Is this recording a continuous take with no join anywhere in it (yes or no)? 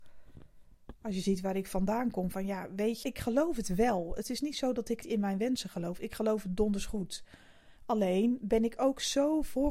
no